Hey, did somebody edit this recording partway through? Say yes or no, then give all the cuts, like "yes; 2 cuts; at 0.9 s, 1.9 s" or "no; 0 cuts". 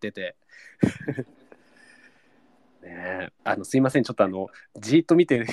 yes; 1 cut; at 3.4 s